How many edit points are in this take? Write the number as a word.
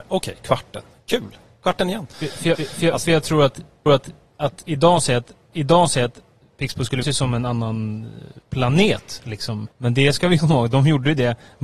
six